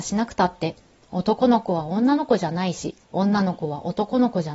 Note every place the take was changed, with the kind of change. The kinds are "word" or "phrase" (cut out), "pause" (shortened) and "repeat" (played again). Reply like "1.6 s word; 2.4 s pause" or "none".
3.0 s pause